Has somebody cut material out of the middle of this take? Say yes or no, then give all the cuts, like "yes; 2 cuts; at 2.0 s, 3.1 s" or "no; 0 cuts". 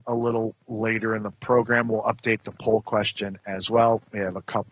no; 0 cuts